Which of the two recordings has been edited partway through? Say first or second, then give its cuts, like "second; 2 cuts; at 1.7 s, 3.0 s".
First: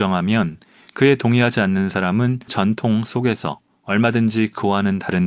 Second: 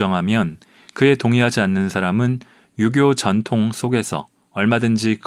first; 1 cut; at 2.5 s